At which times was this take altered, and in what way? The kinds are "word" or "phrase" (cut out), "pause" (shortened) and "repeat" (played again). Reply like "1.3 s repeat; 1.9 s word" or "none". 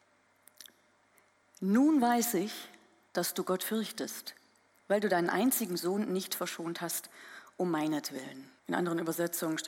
8.6 s pause